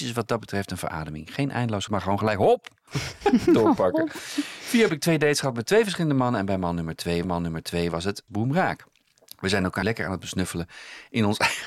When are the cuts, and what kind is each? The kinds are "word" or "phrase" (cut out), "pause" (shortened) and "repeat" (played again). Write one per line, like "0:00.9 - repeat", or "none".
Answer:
0:01.9 - word
0:02.9 - pause
0:04.9 - word
0:07.2 - repeat
0:08.3 - phrase
0:09.0 - pause
0:09.8 - word